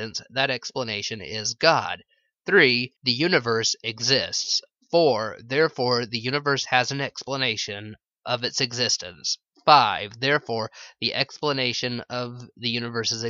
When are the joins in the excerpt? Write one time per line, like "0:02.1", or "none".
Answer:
0:03.0